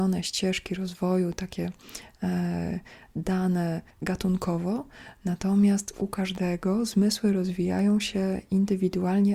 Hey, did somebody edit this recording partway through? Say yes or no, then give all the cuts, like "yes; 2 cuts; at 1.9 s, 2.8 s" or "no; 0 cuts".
yes; 1 cut; at 3.9 s